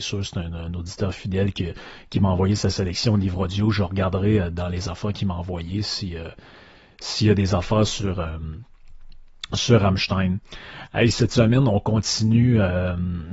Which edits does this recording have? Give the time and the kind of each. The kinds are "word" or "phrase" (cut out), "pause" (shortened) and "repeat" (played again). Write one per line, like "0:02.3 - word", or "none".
none